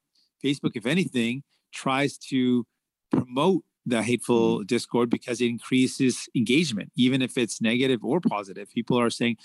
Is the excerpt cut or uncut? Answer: uncut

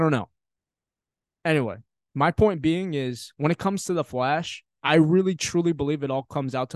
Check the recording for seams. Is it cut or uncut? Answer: uncut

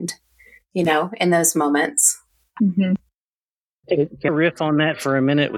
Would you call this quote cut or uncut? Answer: cut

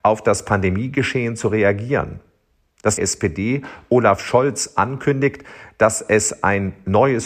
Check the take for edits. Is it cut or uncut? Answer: cut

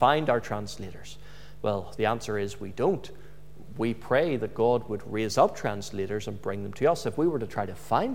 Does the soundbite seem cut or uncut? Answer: cut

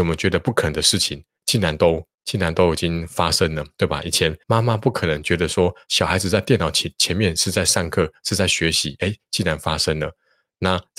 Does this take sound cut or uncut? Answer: cut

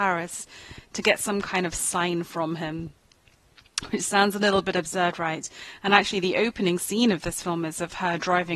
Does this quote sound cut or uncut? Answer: uncut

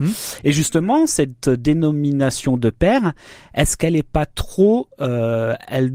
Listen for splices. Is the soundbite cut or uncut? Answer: uncut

